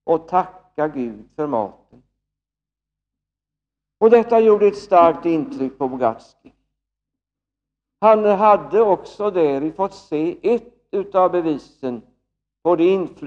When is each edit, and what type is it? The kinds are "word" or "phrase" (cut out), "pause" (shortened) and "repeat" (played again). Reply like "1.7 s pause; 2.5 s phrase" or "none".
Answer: none